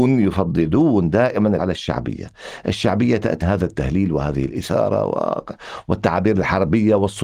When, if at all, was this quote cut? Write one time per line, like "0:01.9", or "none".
0:01.6
0:03.4